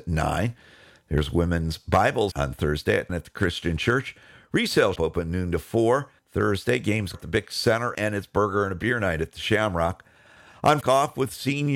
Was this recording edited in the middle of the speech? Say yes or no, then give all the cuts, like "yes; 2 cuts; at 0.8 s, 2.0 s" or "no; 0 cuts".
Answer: yes; 7 cuts; at 2.3 s, 3.1 s, 5.0 s, 6.2 s, 7.1 s, 7.9 s, 10.8 s